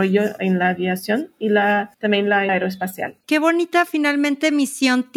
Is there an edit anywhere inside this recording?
yes; 3 cuts; at 1.9 s, 2.5 s, 3.2 s

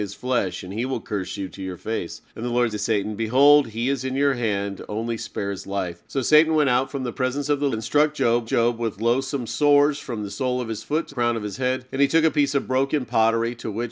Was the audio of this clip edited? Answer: yes; 7 cuts; at 2.3 s, 2.7 s, 6.0 s, 7.7 s, 8.4 s, 11.1 s, 11.9 s

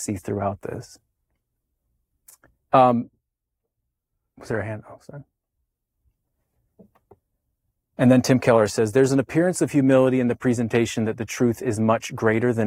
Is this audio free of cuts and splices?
yes; 0 cuts

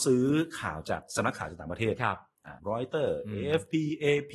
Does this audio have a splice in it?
yes; 1 cut; at 2.6 s

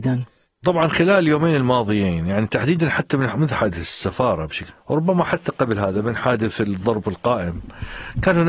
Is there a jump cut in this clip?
yes; 1 cut; at 4.7 s

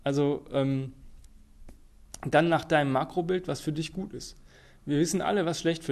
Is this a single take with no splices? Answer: yes; 0 cuts

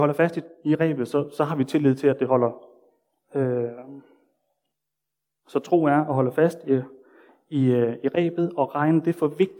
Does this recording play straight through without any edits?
yes; 0 cuts

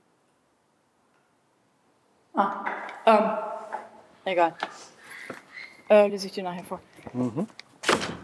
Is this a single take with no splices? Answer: yes; 0 cuts

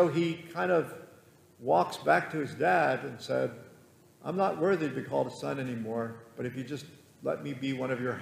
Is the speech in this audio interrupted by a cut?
no; 0 cuts

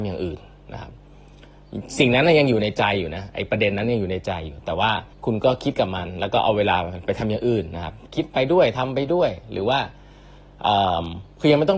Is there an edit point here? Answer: yes; 1 cut; at 5.1 s

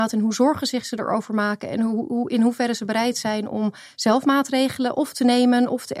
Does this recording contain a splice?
no; 0 cuts

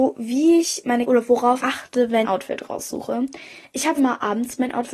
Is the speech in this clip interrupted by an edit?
yes; 4 cuts; at 1.1 s, 1.6 s, 2.2 s, 4.0 s

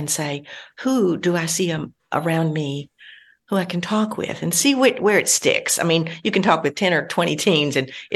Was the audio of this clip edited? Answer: no; 0 cuts

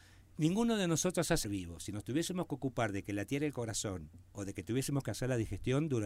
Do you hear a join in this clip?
yes; 2 cuts; at 1.4 s, 4.2 s

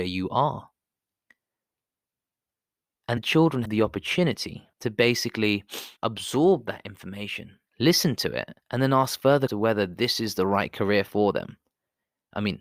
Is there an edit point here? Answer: yes; 7 cuts; at 3.2 s, 3.6 s, 4.7 s, 6.0 s, 7.7 s, 8.6 s, 9.5 s

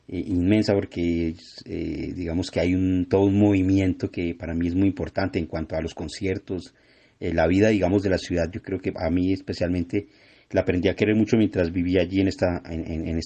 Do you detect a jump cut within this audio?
no; 0 cuts

